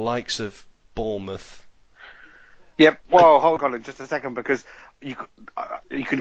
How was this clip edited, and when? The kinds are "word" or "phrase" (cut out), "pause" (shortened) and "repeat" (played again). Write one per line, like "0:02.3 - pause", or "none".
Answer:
0:03.6 - word